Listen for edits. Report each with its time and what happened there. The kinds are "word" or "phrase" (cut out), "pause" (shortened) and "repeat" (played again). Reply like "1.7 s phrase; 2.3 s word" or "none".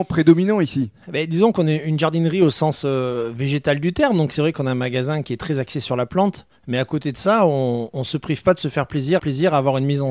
9.2 s repeat